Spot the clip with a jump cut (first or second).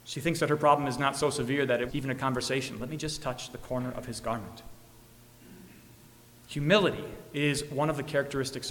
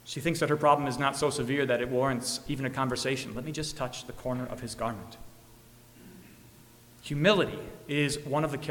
first